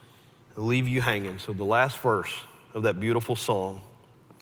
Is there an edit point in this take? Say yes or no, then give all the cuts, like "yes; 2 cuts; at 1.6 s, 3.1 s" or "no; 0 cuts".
no; 0 cuts